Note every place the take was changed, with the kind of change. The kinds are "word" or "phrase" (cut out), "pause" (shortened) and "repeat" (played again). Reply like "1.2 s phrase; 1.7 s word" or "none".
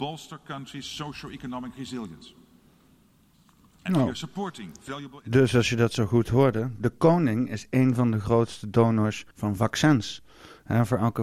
9.3 s pause